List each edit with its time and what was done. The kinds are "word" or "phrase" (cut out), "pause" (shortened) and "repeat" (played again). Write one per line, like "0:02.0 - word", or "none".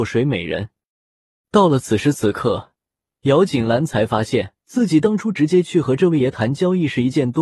0:04.6 - pause